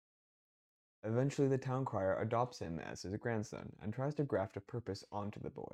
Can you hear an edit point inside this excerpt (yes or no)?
no